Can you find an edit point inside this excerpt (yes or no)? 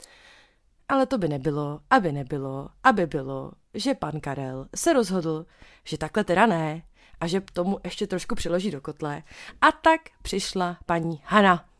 no